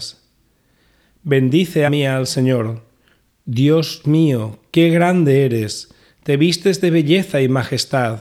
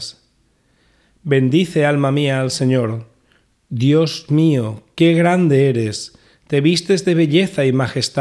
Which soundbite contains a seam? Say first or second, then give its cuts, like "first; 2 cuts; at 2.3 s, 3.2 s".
first; 1 cut; at 1.9 s